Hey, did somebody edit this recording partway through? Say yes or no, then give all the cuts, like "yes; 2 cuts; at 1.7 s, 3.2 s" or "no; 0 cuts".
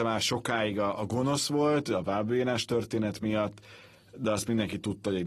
no; 0 cuts